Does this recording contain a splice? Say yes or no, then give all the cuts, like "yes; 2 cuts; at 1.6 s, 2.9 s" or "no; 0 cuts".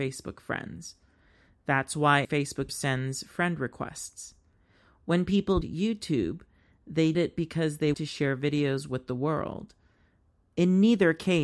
yes; 5 cuts; at 2.2 s, 2.7 s, 5.6 s, 7.1 s, 7.9 s